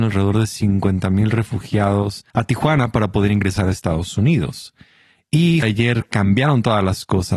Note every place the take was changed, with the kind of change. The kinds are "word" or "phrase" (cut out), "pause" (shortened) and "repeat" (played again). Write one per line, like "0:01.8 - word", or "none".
0:02.3 - pause
0:05.6 - phrase